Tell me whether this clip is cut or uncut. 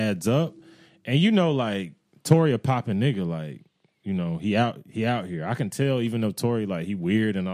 uncut